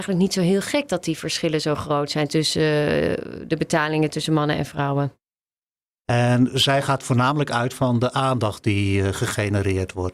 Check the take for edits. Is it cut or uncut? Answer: uncut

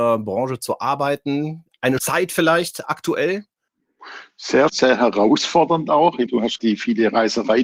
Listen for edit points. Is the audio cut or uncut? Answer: cut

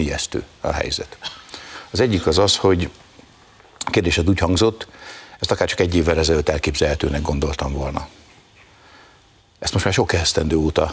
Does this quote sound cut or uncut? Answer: uncut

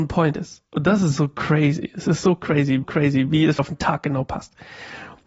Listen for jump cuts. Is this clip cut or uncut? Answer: cut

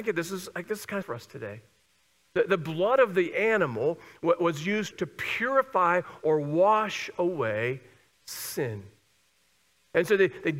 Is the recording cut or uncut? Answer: cut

